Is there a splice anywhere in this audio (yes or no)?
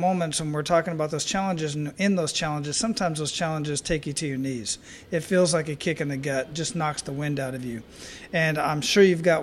no